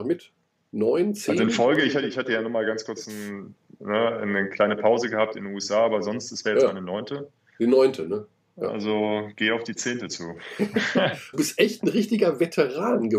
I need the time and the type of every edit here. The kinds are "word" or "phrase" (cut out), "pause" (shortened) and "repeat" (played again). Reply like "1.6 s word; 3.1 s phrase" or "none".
11.3 s word